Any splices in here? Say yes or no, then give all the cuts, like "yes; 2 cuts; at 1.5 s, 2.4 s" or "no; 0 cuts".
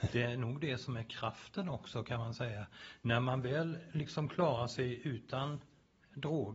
no; 0 cuts